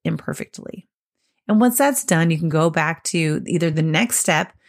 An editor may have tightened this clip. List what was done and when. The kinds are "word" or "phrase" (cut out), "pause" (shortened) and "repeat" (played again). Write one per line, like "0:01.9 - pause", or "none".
none